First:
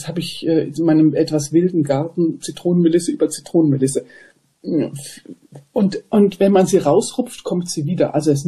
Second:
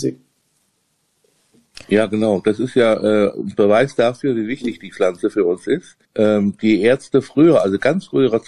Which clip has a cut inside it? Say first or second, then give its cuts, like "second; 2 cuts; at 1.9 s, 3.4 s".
second; 2 cuts; at 1.8 s, 6.0 s